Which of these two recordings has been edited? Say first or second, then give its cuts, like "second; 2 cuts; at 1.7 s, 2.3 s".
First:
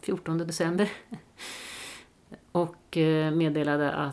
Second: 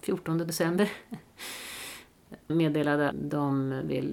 second; 2 cuts; at 2.5 s, 3.1 s